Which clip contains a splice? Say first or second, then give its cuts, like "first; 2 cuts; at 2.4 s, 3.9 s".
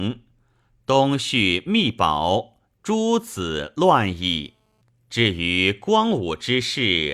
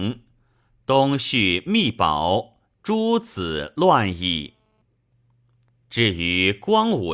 first; 1 cut; at 4.8 s